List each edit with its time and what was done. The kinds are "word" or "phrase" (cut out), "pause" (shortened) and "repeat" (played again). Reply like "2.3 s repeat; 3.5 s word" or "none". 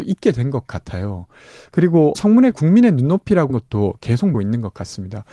2.1 s word; 2.5 s word; 3.5 s word; 4.3 s word